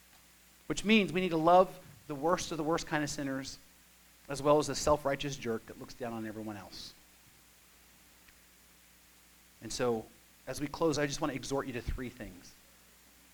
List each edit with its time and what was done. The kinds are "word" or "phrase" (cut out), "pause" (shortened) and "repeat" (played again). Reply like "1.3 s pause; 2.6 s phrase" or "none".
none